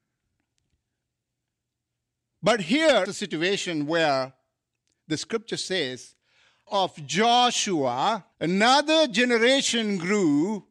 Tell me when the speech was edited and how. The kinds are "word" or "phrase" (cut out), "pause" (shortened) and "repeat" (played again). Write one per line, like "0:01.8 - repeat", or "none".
0:03.1 - word
0:06.7 - phrase
0:08.3 - pause